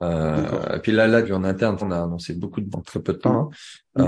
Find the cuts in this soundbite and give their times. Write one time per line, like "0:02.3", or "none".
0:01.2
0:01.8
0:02.7